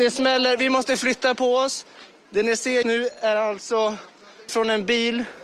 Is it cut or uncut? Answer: cut